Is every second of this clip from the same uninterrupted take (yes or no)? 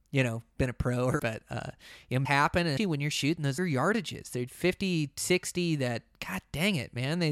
no